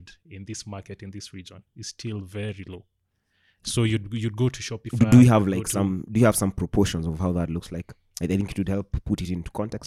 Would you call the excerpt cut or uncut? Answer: uncut